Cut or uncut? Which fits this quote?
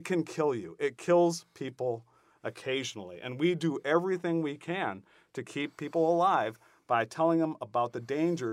uncut